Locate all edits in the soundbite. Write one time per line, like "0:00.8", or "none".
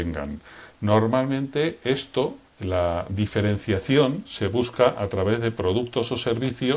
0:02.4

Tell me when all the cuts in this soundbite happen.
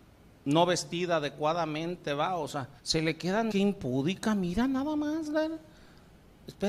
0:02.8
0:03.5

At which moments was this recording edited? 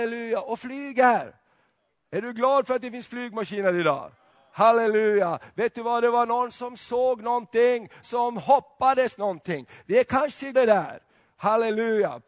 0:08.0
0:10.5

